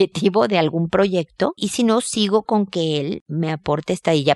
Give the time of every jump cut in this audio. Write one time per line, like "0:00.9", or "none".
0:01.6
0:02.4